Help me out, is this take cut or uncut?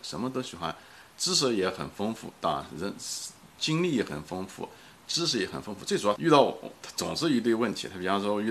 cut